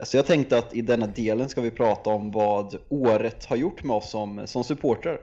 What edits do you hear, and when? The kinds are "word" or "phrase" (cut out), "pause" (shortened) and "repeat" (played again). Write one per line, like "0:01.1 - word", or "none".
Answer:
none